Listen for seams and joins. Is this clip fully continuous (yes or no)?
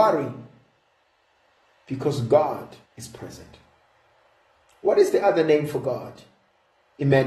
no